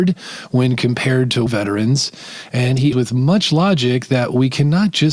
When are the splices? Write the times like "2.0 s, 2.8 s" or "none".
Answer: 1.5 s, 2.9 s